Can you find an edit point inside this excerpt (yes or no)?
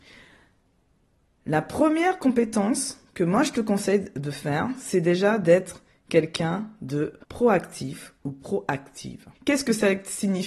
yes